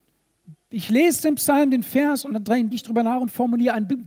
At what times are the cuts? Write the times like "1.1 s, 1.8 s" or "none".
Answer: 2.7 s